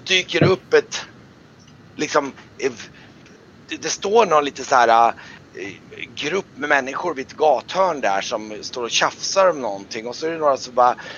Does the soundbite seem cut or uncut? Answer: uncut